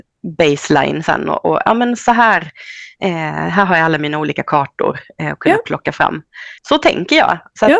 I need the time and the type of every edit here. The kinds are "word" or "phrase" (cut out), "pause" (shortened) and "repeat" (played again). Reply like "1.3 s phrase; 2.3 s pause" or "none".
6.6 s pause

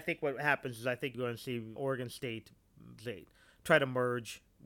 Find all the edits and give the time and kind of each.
1.1 s word; 1.8 s word; 3.0 s word

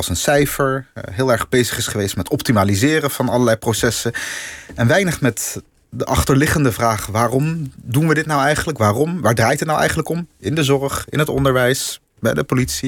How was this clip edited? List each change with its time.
none

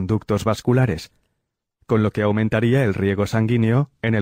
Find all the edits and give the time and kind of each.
none

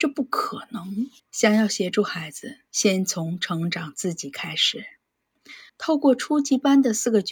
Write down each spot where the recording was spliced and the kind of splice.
1.2 s pause; 2.6 s pause; 5.7 s pause

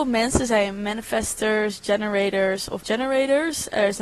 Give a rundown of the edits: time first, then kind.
2.8 s word

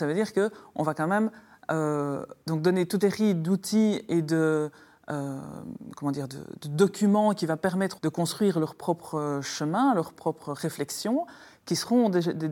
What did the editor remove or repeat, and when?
2.4 s pause; 3.0 s word; 8.0 s phrase

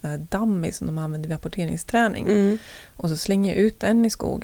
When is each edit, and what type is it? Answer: none

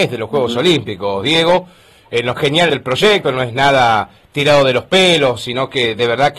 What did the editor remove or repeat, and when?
2.4 s word; 2.7 s phrase; 3.2 s word

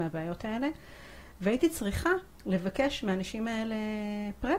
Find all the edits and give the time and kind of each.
2.3 s pause

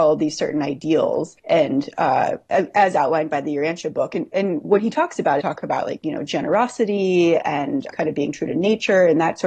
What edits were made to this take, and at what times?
1.4 s pause; 5.4 s phrase; 7.9 s word

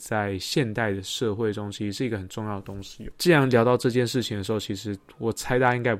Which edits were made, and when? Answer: none

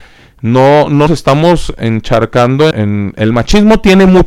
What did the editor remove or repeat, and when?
1.1 s word; 2.7 s word

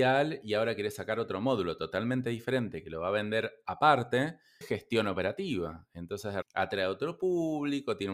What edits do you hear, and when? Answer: 4.6 s word; 6.4 s word

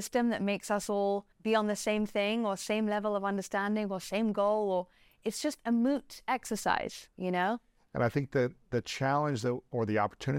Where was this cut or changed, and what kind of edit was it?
1.3 s pause; 7.1 s pause

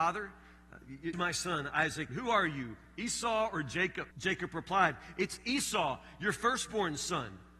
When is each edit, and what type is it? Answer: 1.1 s word; 2.1 s word; 4.1 s pause

